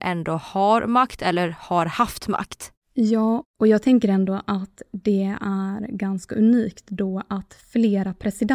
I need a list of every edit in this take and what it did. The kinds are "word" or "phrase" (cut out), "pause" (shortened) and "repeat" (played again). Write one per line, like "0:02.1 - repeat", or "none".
none